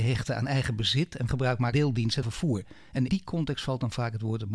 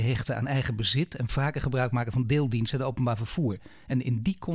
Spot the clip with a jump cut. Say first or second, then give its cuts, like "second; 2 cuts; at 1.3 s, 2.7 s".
first; 4 cuts; at 1.3 s, 1.7 s, 2.2 s, 3.1 s